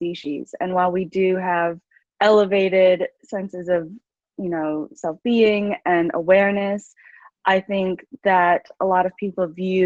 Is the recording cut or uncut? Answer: cut